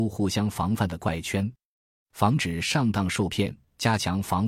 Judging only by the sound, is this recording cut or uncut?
uncut